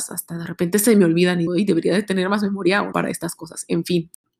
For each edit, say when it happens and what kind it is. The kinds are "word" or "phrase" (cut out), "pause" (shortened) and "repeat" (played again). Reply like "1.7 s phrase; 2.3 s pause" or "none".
1.5 s word; 2.9 s word